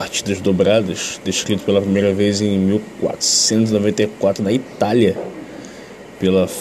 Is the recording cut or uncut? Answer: uncut